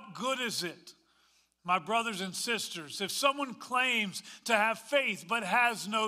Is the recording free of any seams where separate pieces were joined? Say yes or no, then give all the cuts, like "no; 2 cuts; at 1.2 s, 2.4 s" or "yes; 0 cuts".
yes; 0 cuts